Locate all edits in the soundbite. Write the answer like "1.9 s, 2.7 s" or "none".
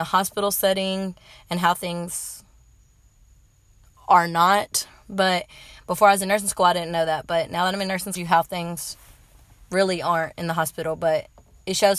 8.2 s